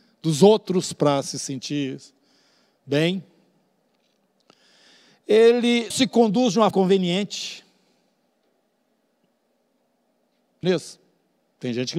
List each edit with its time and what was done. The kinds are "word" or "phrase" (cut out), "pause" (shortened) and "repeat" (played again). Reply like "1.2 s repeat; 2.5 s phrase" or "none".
5.9 s word; 6.7 s word; 10.6 s word